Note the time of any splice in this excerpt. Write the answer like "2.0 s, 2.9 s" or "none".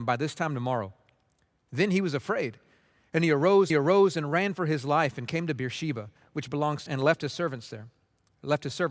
3.7 s, 6.9 s